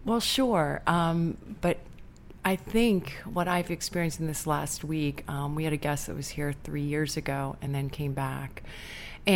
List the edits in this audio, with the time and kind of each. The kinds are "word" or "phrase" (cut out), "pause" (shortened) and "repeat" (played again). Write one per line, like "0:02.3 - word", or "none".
none